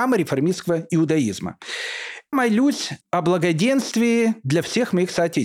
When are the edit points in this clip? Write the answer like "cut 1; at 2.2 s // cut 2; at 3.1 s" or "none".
cut 1; at 2.3 s // cut 2; at 3.0 s